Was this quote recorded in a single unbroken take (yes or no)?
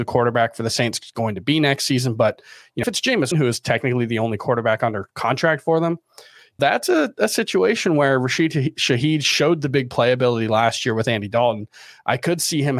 no